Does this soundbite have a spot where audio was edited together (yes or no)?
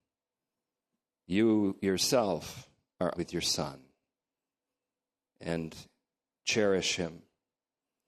yes